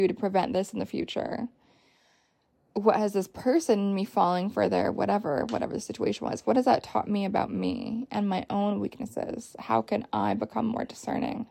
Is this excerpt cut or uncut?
uncut